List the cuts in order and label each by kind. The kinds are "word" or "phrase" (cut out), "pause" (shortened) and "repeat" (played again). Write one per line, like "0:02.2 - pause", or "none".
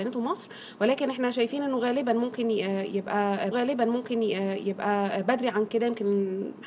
0:03.5 - repeat

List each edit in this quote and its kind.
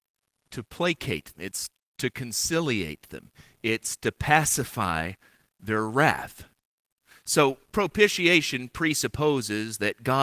0:01.3 - word
0:07.7 - pause

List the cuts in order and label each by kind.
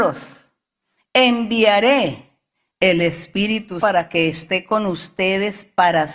0:03.8 - word

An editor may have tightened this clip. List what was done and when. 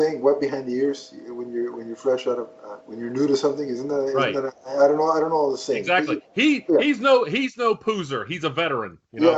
0:02.8 - pause

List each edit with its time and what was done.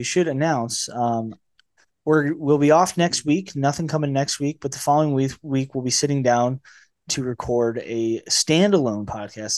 none

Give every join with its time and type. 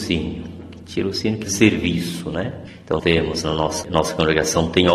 0:01.5 - word
0:03.0 - word
0:03.8 - word

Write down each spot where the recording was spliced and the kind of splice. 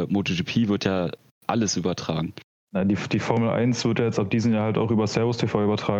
none

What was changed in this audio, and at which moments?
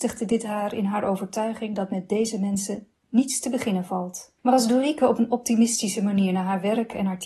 0:04.4 - pause

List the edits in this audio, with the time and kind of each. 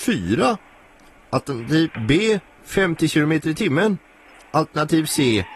none

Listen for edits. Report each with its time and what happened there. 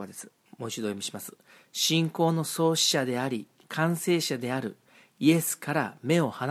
none

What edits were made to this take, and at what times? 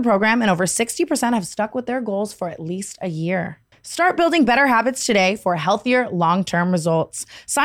none

